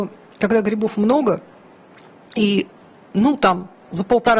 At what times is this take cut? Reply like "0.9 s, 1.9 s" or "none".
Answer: none